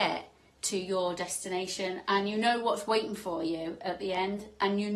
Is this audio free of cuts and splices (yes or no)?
yes